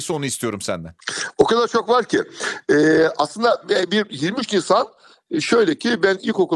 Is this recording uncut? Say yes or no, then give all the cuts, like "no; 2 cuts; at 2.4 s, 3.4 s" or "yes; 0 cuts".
yes; 0 cuts